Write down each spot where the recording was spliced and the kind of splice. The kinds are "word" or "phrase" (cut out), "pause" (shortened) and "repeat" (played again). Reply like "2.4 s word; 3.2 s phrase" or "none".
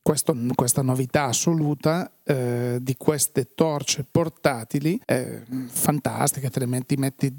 5.0 s pause